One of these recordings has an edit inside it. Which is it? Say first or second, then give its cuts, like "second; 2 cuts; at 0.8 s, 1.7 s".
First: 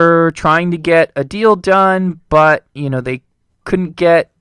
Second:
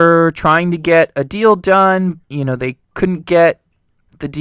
second; 2 cuts; at 2.2 s, 2.8 s